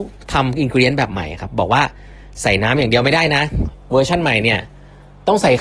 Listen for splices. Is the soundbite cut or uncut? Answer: uncut